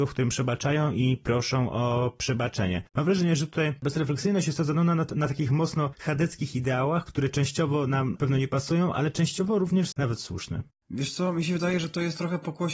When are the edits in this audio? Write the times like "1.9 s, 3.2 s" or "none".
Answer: 8.2 s, 9.9 s